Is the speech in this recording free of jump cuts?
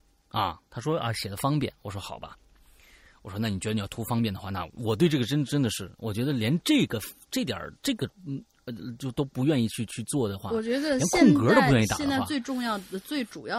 no; 2 cuts; at 7.8 s, 8.1 s

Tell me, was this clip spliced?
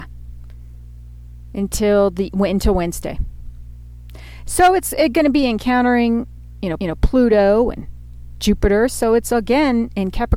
yes; 1 cut; at 6.8 s

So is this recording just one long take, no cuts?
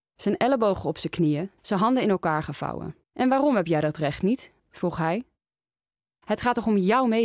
no; 3 cuts; at 1.6 s, 3.0 s, 4.6 s

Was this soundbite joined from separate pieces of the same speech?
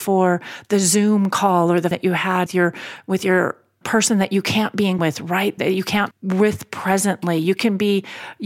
yes; 6 cuts; at 1.9 s, 2.5 s, 3.8 s, 5.0 s, 5.6 s, 6.1 s

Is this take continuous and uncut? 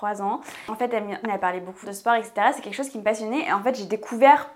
no; 2 cuts; at 1.2 s, 1.8 s

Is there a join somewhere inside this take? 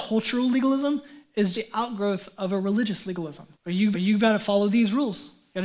yes; 3 cuts; at 1.5 s, 3.5 s, 3.9 s

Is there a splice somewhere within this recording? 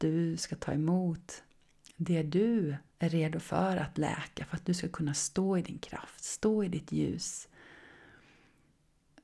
yes; 1 cut; at 2.9 s

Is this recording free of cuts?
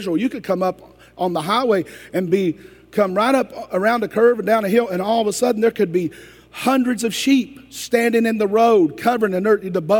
yes; 0 cuts

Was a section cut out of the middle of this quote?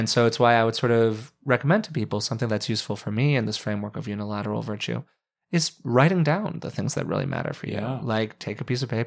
no; 0 cuts

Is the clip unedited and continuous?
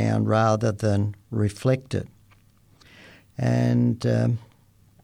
yes; 0 cuts

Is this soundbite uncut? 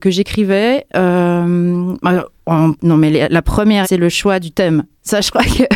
no; 2 cuts; at 2.8 s, 3.8 s

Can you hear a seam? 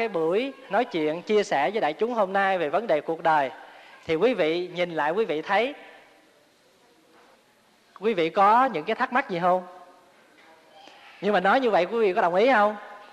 no; 0 cuts

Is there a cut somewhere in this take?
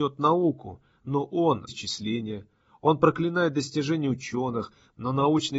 yes; 1 cut; at 1.7 s

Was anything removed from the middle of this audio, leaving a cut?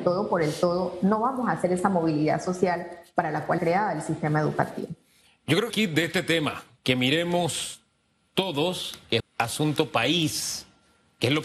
yes; 3 cuts; at 3.6 s, 5.7 s, 9.2 s

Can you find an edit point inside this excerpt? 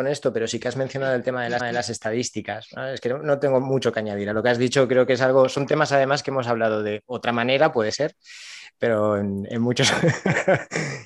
yes; 1 cut; at 1.6 s

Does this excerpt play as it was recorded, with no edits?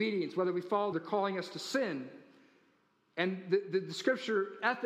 no; 1 cut; at 0.9 s

